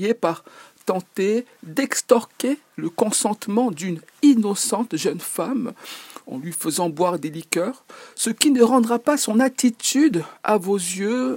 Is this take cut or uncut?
uncut